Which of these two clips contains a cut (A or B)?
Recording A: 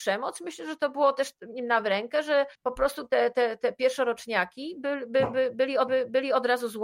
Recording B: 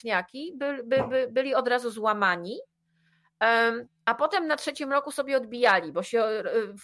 A